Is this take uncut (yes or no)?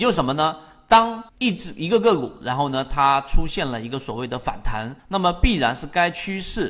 no